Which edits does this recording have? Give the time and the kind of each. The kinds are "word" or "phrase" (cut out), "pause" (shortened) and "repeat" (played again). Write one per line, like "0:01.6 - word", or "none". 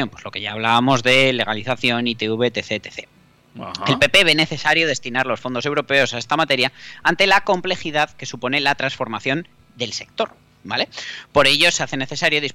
none

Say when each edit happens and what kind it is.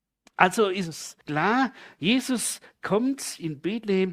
0:01.2 - pause

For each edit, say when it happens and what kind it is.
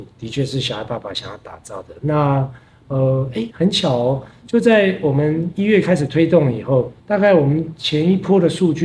0:07.0 - pause

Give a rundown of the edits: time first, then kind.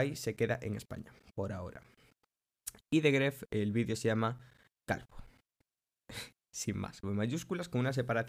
0:07.0 - word

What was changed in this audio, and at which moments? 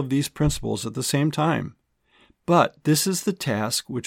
none

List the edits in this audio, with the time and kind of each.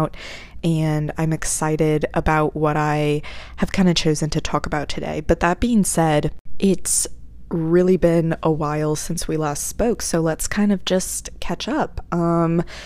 none

